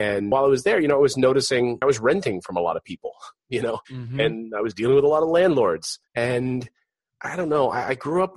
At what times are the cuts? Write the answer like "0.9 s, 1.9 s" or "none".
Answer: 3.8 s, 6.0 s